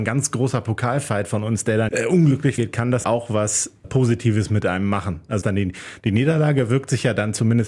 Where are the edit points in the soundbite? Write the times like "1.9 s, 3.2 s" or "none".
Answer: 1.9 s, 2.6 s, 3.0 s, 3.8 s, 5.4 s